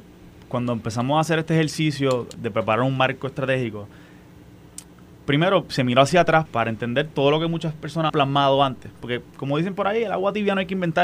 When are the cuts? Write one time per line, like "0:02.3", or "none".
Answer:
0:02.3
0:05.7
0:06.5
0:08.1

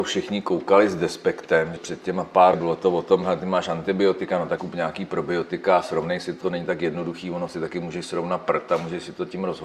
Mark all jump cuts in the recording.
0:01.8
0:02.5
0:04.6
0:06.4

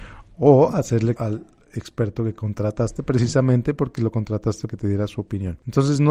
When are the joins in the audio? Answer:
0:01.2
0:04.7

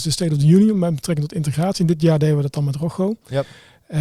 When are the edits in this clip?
none

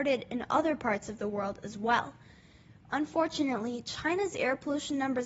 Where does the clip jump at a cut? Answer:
none

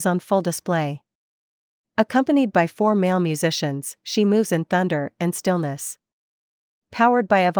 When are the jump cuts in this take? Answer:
none

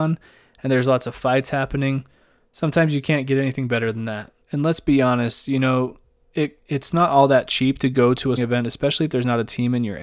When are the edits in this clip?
0:04.4
0:08.4

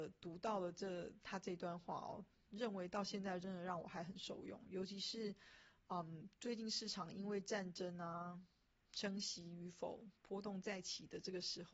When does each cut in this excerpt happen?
none

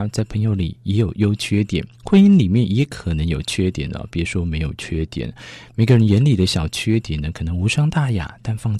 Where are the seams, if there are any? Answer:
0:01.9

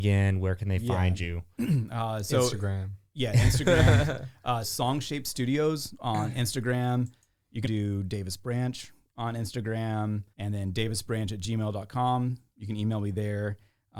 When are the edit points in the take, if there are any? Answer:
0:04.6
0:07.6
0:10.3

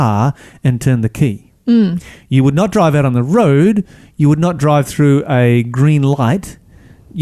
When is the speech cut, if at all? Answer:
none

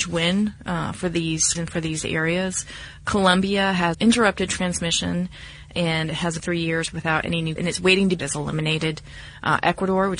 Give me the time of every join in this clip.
0:01.5
0:03.9
0:05.7
0:06.4
0:07.6
0:08.2

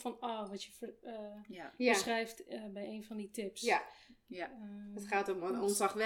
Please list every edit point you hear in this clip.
none

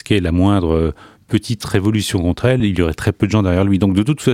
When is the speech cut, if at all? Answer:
none

